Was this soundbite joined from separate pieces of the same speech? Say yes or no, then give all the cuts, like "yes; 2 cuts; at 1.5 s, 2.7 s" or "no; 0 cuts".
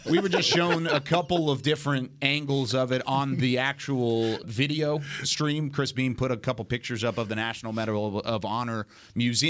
yes; 1 cut; at 4.4 s